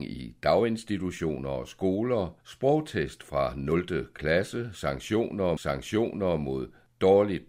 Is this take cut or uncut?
cut